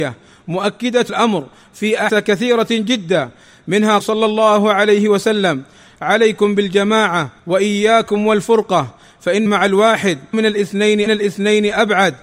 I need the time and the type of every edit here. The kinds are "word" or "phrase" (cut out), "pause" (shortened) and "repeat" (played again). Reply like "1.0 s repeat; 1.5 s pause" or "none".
1.1 s word; 2.1 s word; 4.0 s word; 7.4 s pause; 9.5 s word; 10.3 s word; 11.1 s repeat

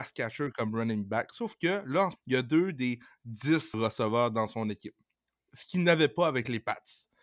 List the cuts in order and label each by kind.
2.2 s word; 3.7 s word

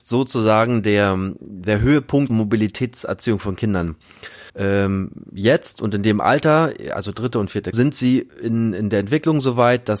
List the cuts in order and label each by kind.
2.3 s phrase; 4.5 s pause; 7.7 s word

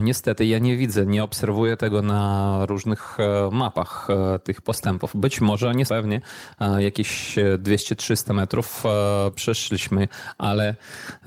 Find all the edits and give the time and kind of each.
5.9 s phrase

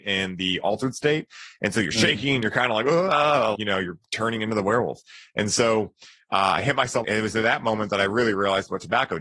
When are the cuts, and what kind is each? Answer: 3.6 s word; 7.0 s phrase

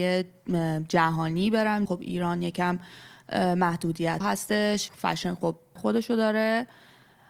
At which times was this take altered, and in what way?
1.9 s word; 4.2 s word; 4.9 s word; 5.8 s word

